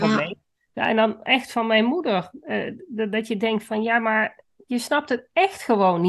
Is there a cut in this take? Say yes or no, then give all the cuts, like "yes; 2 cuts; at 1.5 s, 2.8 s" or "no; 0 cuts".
no; 0 cuts